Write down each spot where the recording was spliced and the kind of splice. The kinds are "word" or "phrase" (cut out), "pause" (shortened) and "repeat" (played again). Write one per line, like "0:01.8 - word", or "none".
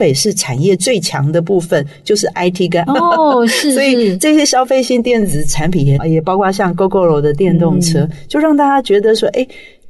0:02.9 - word